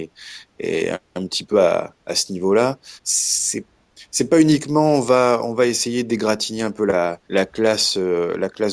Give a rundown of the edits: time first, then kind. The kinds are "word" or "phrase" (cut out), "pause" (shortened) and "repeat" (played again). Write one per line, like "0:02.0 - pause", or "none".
0:03.0 - pause
0:07.2 - pause